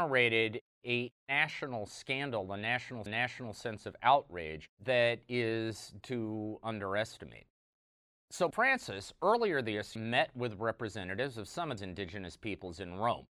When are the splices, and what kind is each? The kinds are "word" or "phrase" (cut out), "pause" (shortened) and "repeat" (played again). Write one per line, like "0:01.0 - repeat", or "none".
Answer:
0:03.1 - repeat
0:04.7 - pause
0:06.0 - word
0:08.5 - word
0:10.0 - word
0:11.8 - word